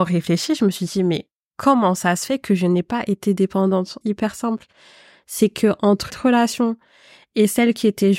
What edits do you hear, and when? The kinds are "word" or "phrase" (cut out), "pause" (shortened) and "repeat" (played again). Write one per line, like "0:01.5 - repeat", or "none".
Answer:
0:04.0 - phrase
0:06.1 - word